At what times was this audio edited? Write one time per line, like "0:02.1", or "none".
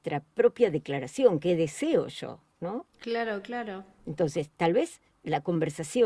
0:02.9

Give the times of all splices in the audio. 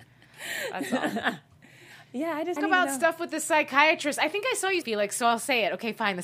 0:02.6
0:04.8

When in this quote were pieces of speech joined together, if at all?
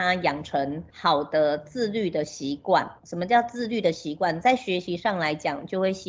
0:03.0

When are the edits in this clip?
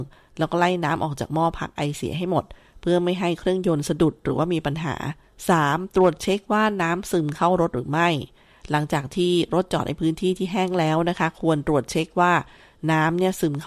0:05.2

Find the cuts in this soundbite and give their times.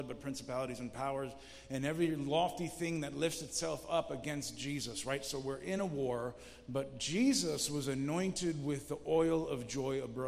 none

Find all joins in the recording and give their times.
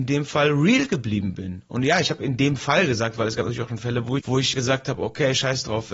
0:04.2
0:04.5

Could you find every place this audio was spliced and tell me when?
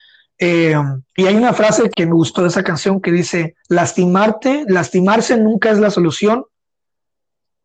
0:01.1
0:01.9
0:02.4
0:03.6

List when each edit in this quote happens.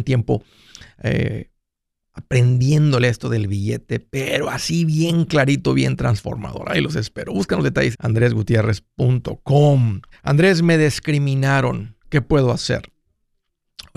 0:07.9
0:10.1
0:12.0

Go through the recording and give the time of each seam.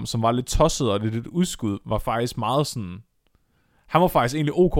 none

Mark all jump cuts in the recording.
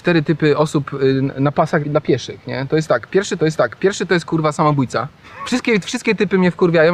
0:01.8
0:03.4

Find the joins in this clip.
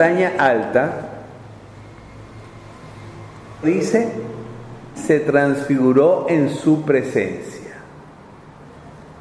0:03.6
0:04.9

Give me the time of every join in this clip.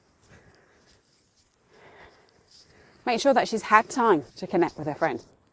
0:04.3

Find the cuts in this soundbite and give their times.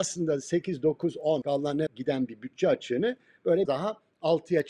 0:01.4
0:01.9
0:03.7

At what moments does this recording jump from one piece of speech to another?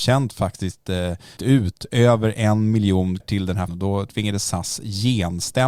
0:01.4
0:03.2
0:03.7

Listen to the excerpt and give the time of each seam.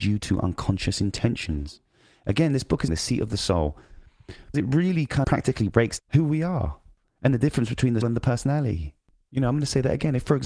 0:02.9
0:04.5
0:05.2
0:06.0
0:08.0

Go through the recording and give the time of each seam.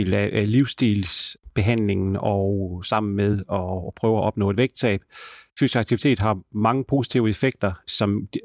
none

